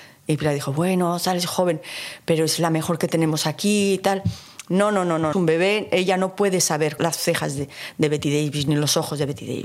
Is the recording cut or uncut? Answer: cut